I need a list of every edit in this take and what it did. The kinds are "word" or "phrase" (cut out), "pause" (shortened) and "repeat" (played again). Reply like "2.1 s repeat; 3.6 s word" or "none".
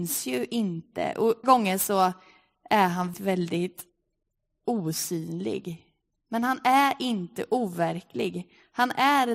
1.4 s word; 3.1 s word